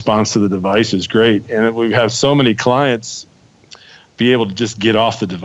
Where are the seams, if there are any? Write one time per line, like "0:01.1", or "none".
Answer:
none